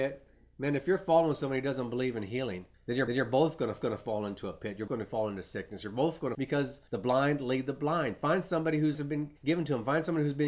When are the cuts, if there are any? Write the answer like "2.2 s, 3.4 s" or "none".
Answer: 2.7 s, 3.1 s, 3.8 s, 4.9 s, 6.3 s, 6.9 s, 8.9 s, 9.4 s

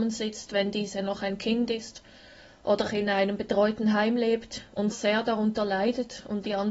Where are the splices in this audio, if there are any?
2.8 s, 4.9 s

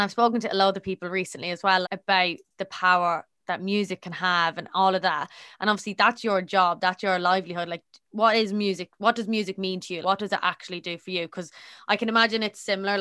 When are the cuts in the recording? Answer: 1.8 s, 8.1 s, 10.0 s

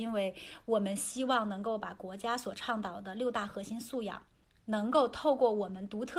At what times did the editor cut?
4.4 s

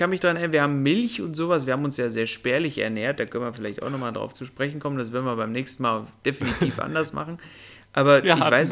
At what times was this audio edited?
none

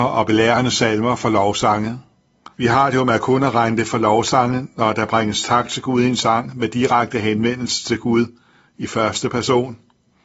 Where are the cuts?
2.5 s

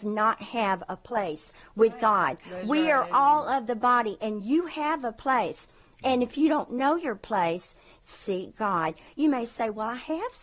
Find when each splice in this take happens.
none

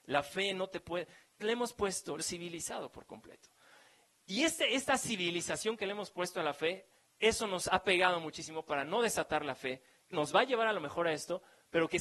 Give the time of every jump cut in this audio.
1.4 s, 2.2 s, 10.1 s

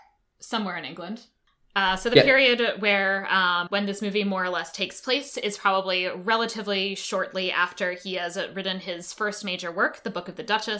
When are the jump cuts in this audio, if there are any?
1.4 s, 3.7 s

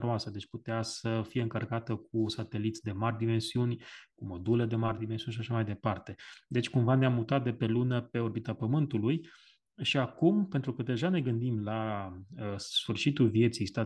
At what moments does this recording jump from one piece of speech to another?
none

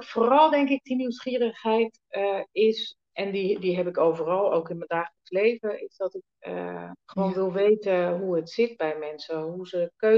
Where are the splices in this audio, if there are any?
3.0 s, 7.0 s

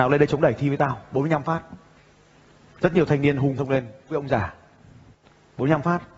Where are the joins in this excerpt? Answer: 3.6 s, 4.1 s

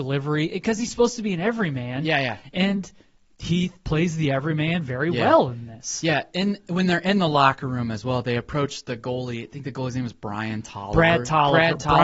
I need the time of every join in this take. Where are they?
none

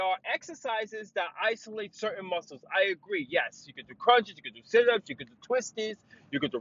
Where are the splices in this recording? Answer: none

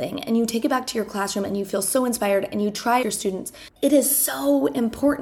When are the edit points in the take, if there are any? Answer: 3.0 s, 3.8 s

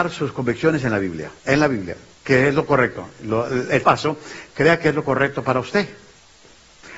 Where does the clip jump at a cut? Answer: 1.4 s, 3.8 s

